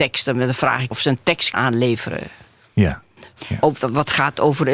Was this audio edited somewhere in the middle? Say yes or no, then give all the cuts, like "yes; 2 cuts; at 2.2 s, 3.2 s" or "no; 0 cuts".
yes; 2 cuts; at 0.9 s, 1.5 s